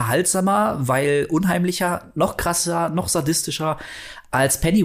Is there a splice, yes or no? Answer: no